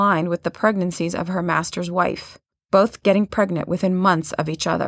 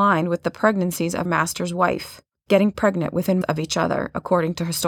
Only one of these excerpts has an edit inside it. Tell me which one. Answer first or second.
second